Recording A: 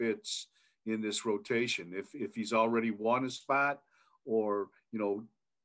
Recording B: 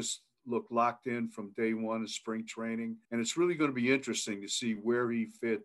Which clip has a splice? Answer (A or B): B